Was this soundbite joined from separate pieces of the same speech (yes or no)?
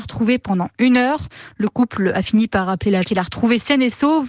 yes